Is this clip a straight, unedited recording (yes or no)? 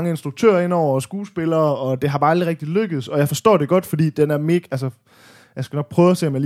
yes